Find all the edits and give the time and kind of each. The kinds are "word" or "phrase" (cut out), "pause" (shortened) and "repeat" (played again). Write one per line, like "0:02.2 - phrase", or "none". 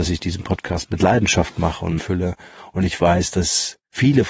0:02.0 - phrase

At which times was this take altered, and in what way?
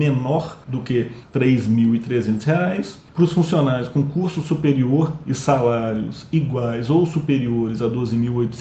0:01.2 - pause

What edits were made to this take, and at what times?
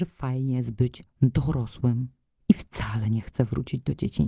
none

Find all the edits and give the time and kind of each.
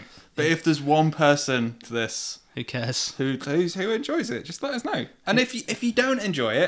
0:01.8 - word

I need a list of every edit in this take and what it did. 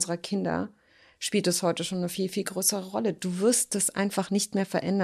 none

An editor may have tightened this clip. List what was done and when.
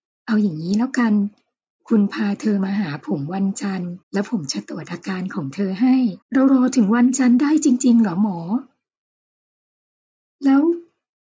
0:04.0 - pause
0:06.2 - pause

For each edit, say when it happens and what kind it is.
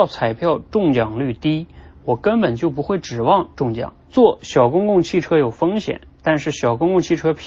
0:04.0 - pause

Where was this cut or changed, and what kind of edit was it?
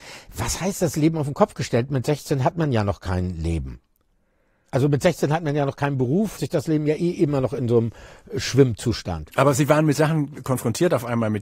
0:06.4 - phrase

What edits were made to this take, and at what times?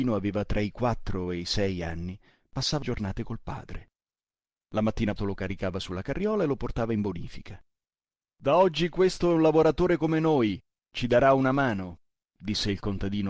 0:02.8 - word
0:05.2 - word

